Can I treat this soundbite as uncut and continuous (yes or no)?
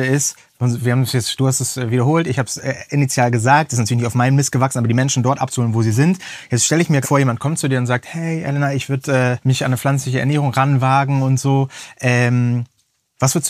no